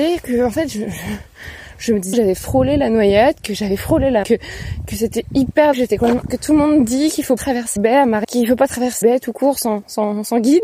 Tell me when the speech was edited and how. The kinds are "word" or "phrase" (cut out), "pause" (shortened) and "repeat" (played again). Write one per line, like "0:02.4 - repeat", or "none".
0:02.1 - word
0:04.2 - word
0:05.7 - word
0:06.3 - word
0:07.4 - word
0:07.8 - word
0:08.2 - word
0:09.0 - word